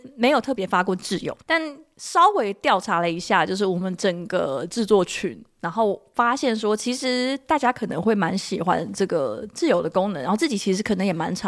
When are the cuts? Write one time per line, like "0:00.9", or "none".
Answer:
0:01.4